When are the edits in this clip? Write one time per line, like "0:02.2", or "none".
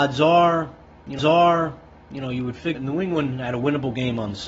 0:01.2
0:02.7